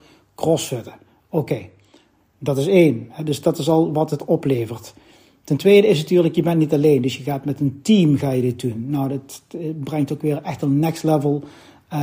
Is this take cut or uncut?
uncut